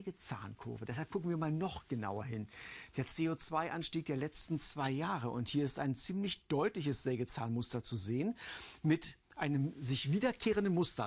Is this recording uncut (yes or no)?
yes